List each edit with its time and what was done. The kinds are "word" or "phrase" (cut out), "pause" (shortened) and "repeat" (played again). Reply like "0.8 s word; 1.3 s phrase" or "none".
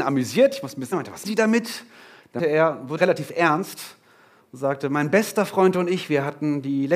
0.9 s word; 1.2 s word; 2.4 s word; 3.0 s word